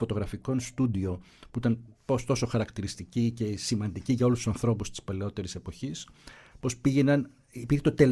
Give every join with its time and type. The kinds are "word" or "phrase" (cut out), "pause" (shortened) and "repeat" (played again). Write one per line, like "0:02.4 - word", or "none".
0:01.9 - pause